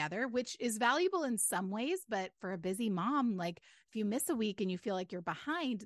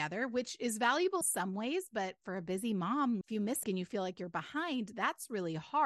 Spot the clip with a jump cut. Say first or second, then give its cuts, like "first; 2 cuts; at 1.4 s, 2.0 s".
second; 3 cuts; at 1.2 s, 3.2 s, 3.6 s